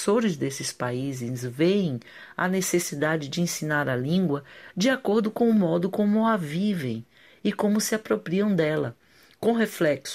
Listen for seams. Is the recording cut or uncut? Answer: uncut